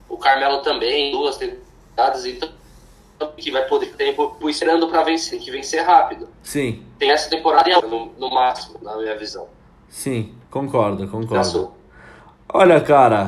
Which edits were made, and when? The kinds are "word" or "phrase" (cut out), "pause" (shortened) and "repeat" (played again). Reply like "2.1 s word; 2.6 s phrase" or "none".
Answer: 3.4 s phrase; 3.9 s word; 4.4 s word; 6.3 s pause; 7.8 s word; 10.4 s pause